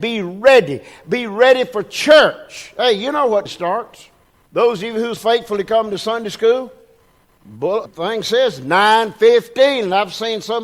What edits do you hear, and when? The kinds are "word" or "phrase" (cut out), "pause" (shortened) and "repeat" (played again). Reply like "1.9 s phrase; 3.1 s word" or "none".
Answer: 3.5 s word; 4.3 s pause; 5.2 s word; 7.9 s word